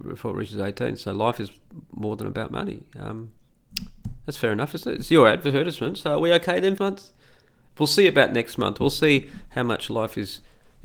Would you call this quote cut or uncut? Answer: cut